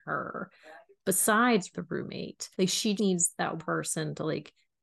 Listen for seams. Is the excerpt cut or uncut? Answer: cut